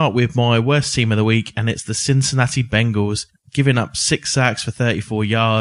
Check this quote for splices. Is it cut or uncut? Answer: uncut